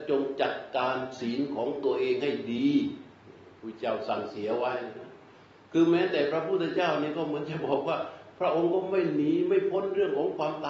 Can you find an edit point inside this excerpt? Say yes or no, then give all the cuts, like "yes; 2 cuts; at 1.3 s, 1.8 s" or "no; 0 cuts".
no; 0 cuts